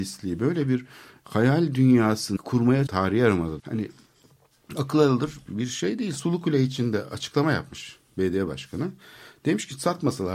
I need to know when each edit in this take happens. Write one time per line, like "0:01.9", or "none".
0:02.4
0:02.9
0:03.6